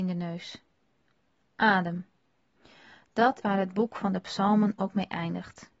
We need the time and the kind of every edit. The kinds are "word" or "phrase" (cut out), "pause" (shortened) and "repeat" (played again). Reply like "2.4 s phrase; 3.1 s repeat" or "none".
3.4 s word